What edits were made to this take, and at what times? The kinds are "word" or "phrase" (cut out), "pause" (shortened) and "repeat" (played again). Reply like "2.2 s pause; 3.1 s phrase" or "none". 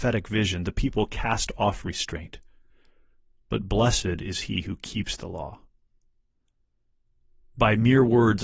none